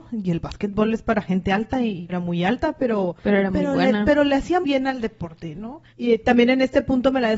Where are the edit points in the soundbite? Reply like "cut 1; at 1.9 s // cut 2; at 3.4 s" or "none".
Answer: cut 1; at 2.1 s // cut 2; at 3.2 s // cut 3; at 4.6 s // cut 4; at 5.9 s